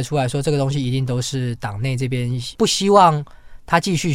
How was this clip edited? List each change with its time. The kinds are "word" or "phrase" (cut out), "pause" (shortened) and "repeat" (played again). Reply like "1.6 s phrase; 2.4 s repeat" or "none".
2.5 s pause